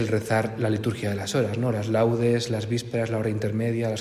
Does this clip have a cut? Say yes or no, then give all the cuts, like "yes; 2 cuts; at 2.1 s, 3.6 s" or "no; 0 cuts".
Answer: no; 0 cuts